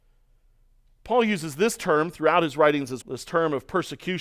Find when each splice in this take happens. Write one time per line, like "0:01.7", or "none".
0:03.0